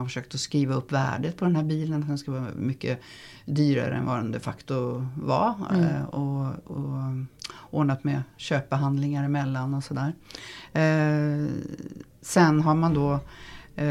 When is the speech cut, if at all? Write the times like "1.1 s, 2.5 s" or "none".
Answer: none